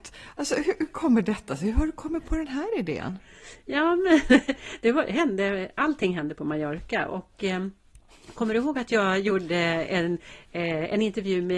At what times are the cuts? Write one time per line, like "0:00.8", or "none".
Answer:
none